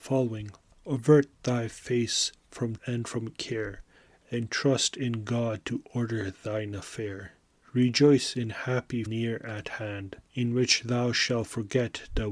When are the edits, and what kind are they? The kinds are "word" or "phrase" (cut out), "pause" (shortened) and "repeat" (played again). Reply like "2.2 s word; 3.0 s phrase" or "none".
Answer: 2.8 s word; 9.1 s word; 10.3 s pause